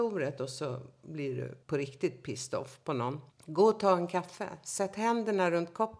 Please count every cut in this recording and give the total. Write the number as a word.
two